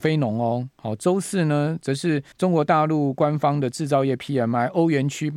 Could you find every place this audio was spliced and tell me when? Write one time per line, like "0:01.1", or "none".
0:02.3